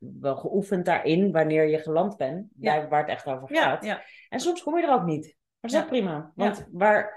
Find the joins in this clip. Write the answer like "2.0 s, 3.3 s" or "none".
none